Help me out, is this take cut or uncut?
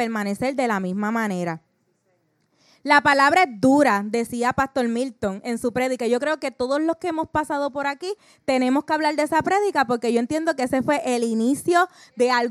uncut